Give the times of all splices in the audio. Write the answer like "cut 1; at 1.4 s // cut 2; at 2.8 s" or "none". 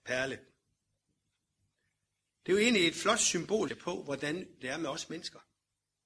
cut 1; at 3.7 s